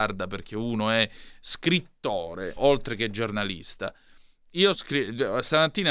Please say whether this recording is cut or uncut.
cut